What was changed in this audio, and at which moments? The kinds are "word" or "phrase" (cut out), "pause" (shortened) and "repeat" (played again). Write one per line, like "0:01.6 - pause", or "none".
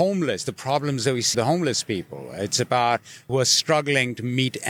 0:01.3 - word
0:03.3 - word